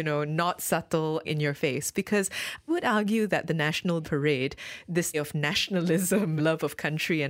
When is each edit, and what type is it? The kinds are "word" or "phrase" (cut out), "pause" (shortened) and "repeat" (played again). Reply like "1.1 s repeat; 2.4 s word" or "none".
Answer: 1.2 s word; 2.7 s word; 4.0 s word; 5.1 s word; 6.4 s word

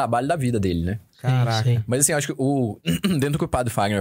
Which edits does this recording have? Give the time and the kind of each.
1.1 s pause

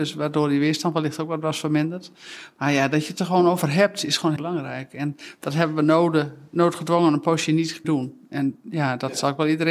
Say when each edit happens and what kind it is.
4.4 s word; 7.8 s word

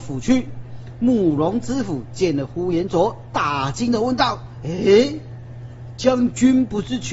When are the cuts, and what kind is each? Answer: none

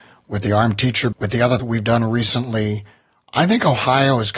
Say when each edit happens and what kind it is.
1.1 s word; 1.6 s word

